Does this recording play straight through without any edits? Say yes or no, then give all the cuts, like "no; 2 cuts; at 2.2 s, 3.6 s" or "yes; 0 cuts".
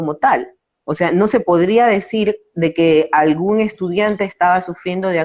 yes; 0 cuts